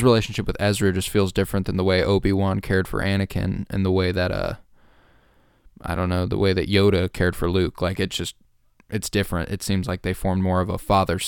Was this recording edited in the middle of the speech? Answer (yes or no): no